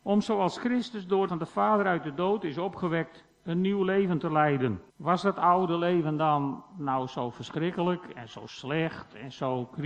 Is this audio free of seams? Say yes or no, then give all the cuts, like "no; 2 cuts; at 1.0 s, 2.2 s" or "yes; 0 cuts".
no; 2 cuts; at 1.3 s, 4.9 s